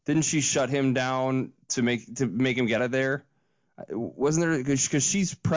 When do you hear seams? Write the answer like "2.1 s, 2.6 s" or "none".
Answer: 1.6 s, 2.8 s